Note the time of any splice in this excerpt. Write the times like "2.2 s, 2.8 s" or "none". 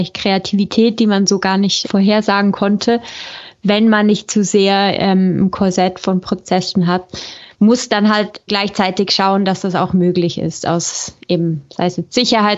1.8 s, 7.5 s, 8.5 s